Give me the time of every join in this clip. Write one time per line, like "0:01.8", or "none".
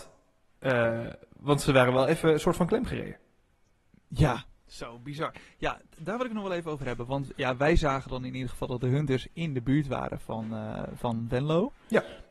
none